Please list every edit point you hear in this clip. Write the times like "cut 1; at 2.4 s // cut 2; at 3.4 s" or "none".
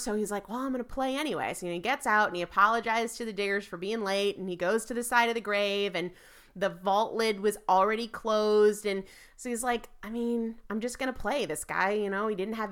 none